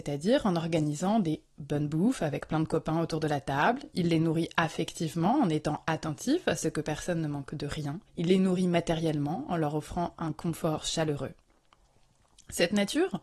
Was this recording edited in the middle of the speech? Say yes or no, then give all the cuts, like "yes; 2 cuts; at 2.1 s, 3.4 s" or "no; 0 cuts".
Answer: yes; 1 cut; at 8.1 s